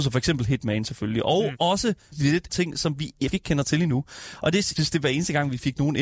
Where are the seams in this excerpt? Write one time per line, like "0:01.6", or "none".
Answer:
0:01.5
0:02.1
0:02.5
0:03.3
0:04.8